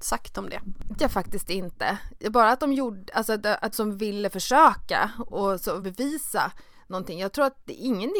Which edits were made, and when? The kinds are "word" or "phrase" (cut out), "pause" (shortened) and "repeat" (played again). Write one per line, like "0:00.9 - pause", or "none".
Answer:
0:00.9 - word
0:03.7 - phrase
0:05.8 - word